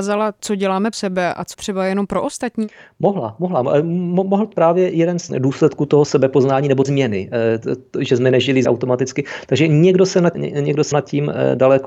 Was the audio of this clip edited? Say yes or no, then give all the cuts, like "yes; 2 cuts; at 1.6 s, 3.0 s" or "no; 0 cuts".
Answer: yes; 8 cuts; at 0.9 s, 1.5 s, 4.5 s, 5.3 s, 6.8 s, 8.6 s, 10.3 s, 10.9 s